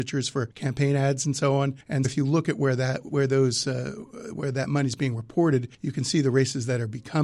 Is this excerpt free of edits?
no; 1 cut; at 2.0 s

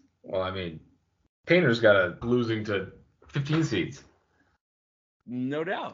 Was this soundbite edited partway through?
yes; 1 cut; at 2.2 s

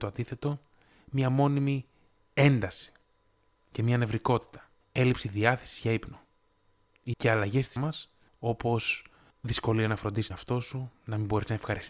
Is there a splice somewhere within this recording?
yes; 3 cuts; at 7.1 s, 7.8 s, 10.3 s

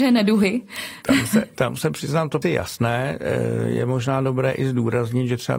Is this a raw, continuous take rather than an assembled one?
no; 1 cut; at 2.4 s

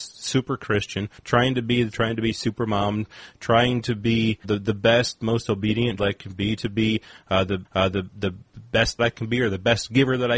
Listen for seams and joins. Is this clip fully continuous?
no; 7 cuts; at 1.2 s, 1.9 s, 4.4 s, 6.0 s, 6.6 s, 7.6 s, 9.0 s

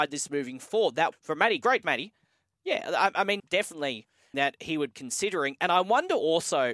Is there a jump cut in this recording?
yes; 5 cuts; at 1.1 s, 1.8 s, 3.4 s, 4.3 s, 4.9 s

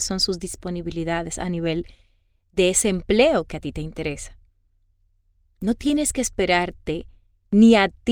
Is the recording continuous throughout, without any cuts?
yes; 0 cuts

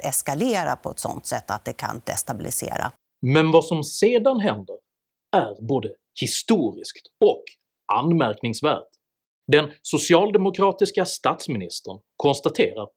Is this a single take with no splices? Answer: yes; 0 cuts

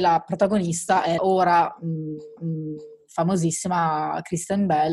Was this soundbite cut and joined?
yes; 2 cuts; at 1.2 s, 2.4 s

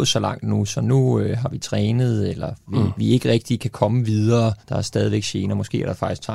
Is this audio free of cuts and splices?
no; 1 cut; at 4.6 s

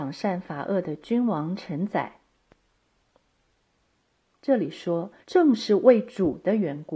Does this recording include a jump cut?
yes; 1 cut; at 5.2 s

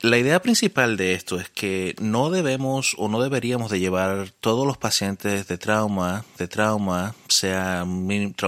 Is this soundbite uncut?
no; 1 cut; at 6.4 s

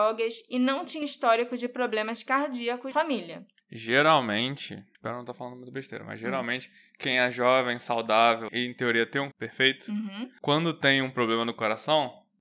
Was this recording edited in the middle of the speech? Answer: yes; 4 cuts; at 1.0 s, 2.9 s, 8.5 s, 9.3 s

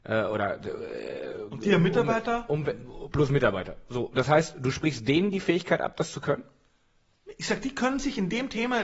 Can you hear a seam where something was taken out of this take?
no; 0 cuts

